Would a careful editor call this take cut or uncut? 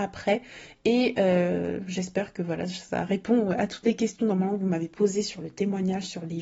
uncut